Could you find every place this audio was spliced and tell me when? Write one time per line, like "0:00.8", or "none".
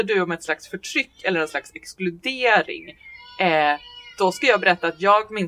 none